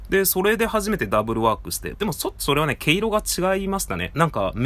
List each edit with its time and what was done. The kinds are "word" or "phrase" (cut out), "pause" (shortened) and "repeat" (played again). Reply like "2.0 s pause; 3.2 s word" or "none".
1.9 s phrase